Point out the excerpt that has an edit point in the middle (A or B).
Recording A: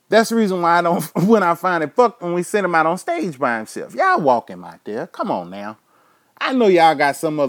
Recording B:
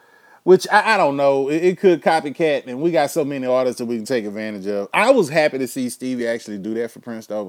A